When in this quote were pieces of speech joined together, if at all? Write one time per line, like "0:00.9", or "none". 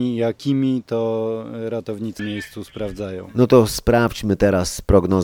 0:02.2